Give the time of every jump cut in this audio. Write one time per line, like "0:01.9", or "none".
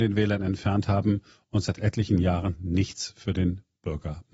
none